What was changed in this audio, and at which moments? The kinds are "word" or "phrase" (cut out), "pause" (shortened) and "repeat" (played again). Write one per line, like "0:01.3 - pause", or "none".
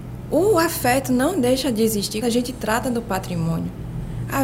0:02.2 - word